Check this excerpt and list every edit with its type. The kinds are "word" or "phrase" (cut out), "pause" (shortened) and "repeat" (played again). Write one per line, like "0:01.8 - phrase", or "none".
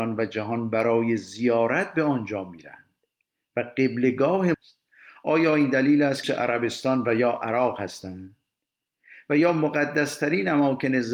0:04.5 - word
0:06.2 - phrase